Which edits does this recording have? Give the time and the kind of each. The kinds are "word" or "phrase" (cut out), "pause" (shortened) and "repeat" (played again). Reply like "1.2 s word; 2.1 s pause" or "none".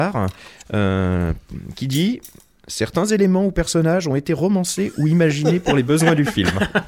none